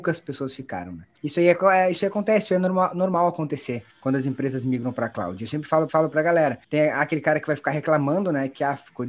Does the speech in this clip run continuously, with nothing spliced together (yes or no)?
no